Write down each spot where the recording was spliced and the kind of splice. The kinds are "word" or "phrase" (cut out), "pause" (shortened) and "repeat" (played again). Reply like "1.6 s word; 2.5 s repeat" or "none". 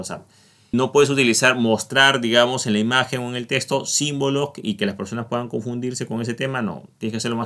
none